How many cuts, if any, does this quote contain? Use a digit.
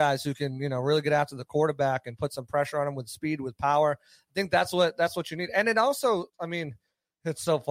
1